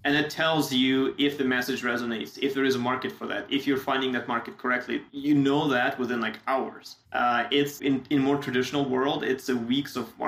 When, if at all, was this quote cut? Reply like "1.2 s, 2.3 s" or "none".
5.1 s, 7.0 s, 7.8 s